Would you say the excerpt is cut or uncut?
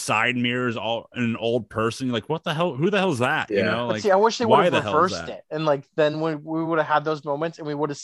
uncut